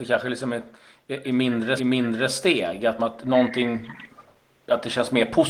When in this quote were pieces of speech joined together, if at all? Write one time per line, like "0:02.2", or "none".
0:01.8
0:03.0